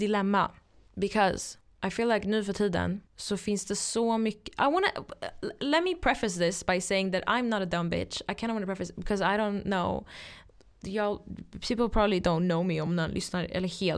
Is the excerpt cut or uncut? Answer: uncut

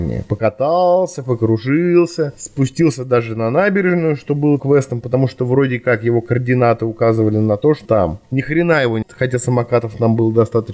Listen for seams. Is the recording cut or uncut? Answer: cut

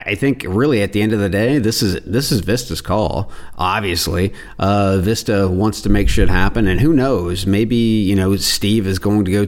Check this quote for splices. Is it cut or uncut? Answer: uncut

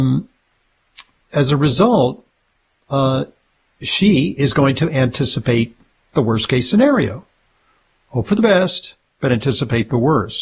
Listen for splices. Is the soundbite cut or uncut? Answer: uncut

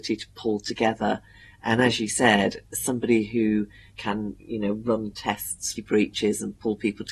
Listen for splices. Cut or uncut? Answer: cut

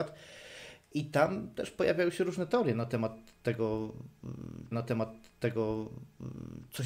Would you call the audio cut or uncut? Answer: cut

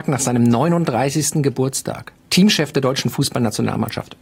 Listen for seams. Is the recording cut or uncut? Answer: cut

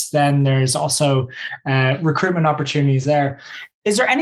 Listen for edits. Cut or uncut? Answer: uncut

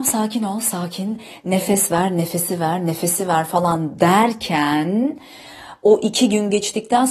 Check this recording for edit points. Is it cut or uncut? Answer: uncut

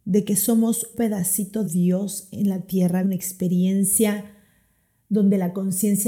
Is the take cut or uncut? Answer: cut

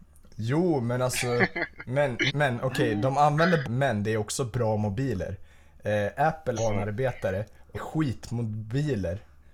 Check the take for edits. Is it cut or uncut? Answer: cut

